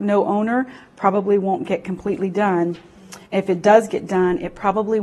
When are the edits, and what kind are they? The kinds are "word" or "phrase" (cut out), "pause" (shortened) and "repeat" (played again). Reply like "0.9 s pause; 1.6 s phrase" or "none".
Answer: 3.3 s pause